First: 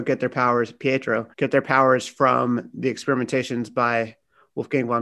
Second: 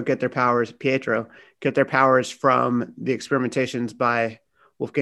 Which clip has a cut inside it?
first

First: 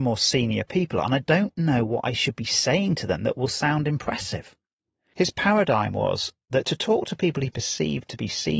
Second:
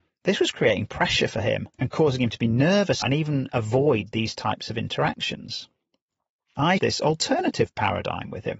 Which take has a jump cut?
second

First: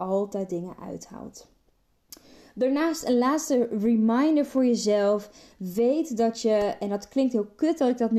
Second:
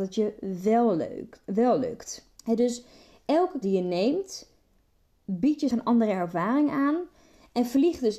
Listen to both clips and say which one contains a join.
second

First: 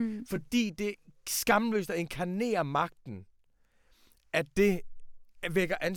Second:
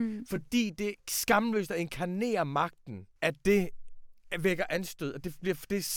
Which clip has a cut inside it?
second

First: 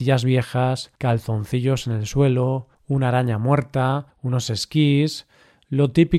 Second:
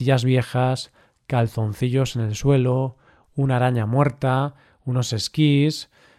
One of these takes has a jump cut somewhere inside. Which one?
first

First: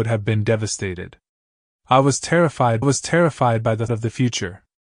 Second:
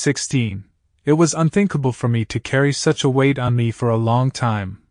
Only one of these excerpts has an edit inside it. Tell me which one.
first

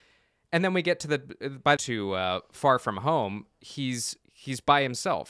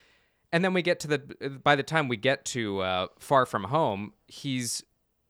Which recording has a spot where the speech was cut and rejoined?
first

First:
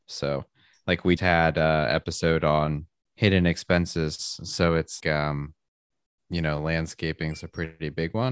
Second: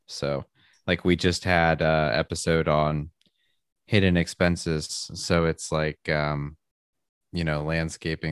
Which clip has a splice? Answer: first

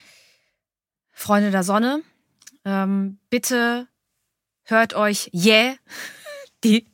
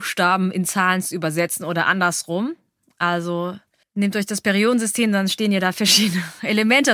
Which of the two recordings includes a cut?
second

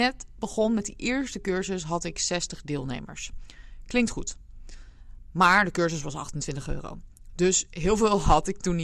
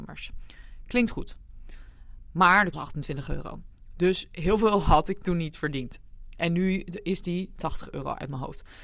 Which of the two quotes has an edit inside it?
second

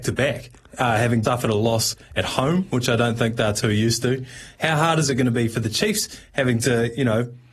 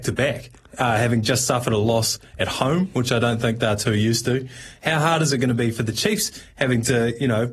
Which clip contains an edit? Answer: first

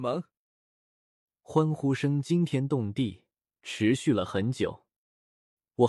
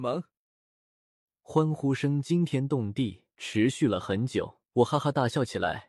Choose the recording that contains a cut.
second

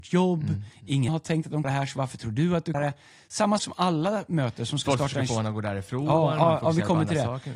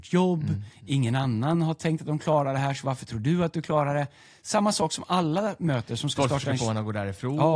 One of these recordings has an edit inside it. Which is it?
first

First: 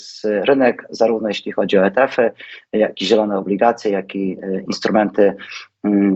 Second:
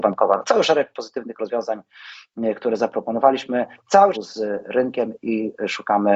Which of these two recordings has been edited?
second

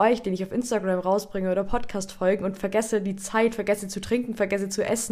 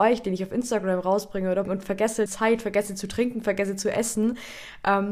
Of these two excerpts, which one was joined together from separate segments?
second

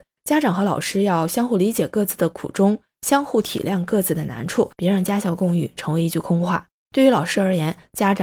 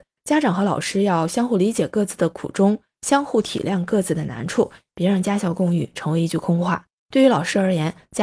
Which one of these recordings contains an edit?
first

